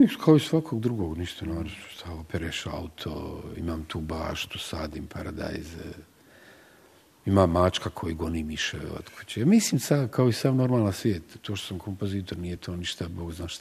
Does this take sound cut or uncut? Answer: uncut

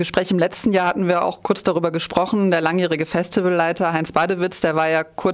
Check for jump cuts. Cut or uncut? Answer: uncut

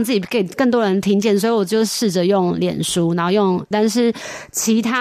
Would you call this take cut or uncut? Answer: cut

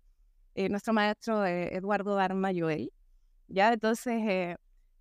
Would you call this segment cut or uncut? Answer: uncut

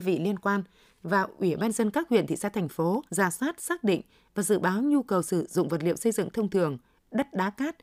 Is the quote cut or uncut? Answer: cut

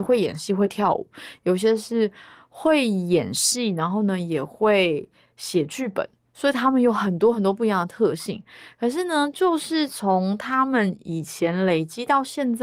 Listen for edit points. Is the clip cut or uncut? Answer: uncut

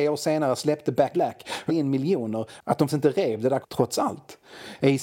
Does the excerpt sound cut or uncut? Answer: cut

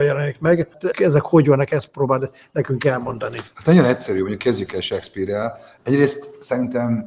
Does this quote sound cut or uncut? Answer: cut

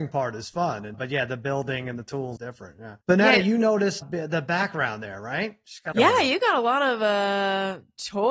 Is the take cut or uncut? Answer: cut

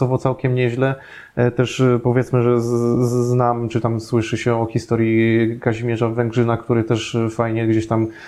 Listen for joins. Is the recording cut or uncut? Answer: uncut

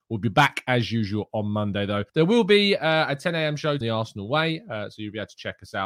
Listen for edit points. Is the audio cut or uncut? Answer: cut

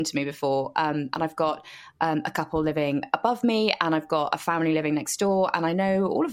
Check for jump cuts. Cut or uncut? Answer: uncut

